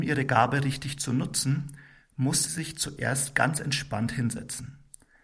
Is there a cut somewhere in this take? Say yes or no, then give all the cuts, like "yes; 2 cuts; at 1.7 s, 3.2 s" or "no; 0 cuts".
yes; 1 cut; at 2.5 s